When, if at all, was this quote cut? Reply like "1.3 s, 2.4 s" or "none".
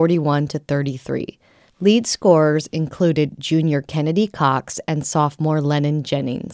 none